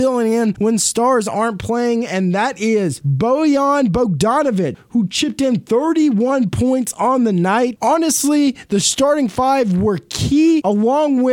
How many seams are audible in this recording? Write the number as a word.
zero